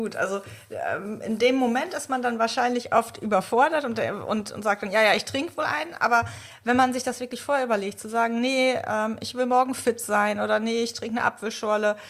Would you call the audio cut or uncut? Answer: uncut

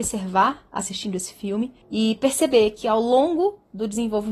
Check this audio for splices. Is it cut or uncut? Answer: cut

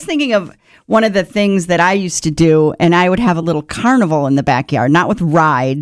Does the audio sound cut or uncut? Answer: uncut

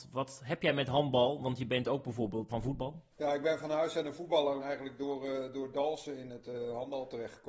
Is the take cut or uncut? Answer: cut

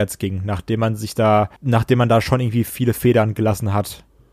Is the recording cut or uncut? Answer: cut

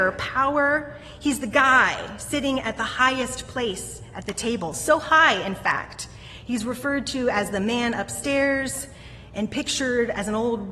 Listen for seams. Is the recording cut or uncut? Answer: uncut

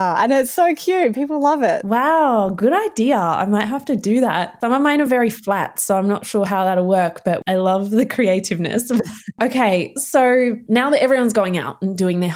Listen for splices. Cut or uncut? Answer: uncut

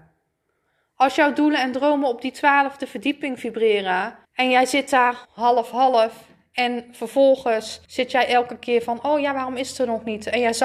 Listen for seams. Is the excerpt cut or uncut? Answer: cut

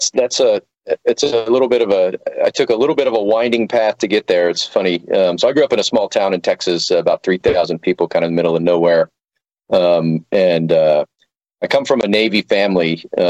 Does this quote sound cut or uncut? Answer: uncut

